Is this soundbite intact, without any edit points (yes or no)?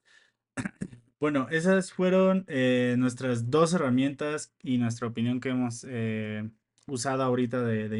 yes